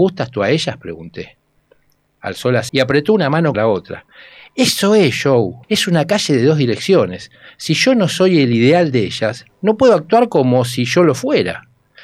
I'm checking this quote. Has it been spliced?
yes; 3 cuts; at 2.7 s, 3.5 s, 5.6 s

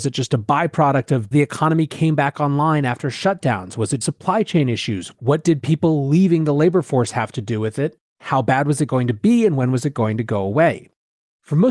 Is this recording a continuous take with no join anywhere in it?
no; 2 cuts; at 1.3 s, 4.0 s

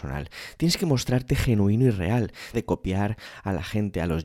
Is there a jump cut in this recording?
yes; 1 cut; at 2.5 s

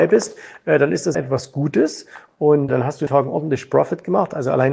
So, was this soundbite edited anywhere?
yes; 3 cuts; at 1.1 s, 2.7 s, 3.1 s

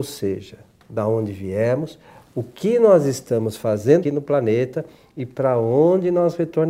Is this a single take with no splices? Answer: no; 1 cut; at 4.0 s

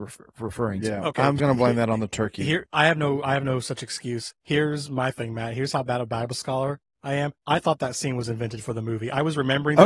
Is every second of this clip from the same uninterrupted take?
no; 4 cuts; at 1.4 s, 2.6 s, 4.4 s, 7.4 s

